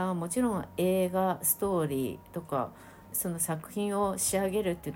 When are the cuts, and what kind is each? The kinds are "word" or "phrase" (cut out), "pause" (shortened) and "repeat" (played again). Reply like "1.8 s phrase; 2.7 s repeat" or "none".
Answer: 3.1 s word

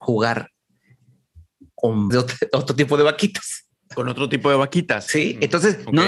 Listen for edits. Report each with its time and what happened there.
2.1 s word

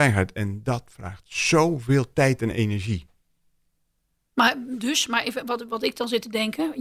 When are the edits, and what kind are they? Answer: none

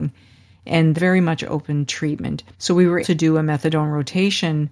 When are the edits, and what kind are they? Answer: 0.9 s phrase; 1.9 s word; 2.5 s pause; 3.0 s word

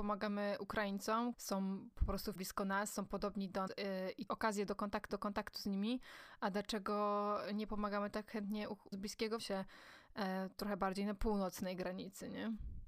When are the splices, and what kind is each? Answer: 1.3 s word; 2.3 s word; 3.7 s word; 4.3 s phrase; 5.1 s repeat; 8.9 s word; 9.4 s phrase

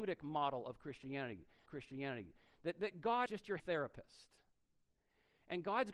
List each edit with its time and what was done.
1.7 s repeat; 3.3 s word; 3.6 s word

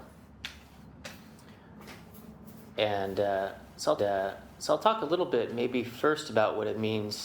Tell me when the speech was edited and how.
4.0 s repeat

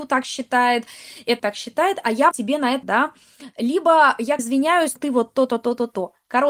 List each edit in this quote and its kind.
1.4 s word; 2.3 s word; 2.8 s word; 4.4 s word; 5.0 s word

